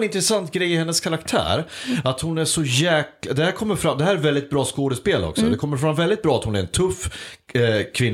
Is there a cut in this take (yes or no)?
no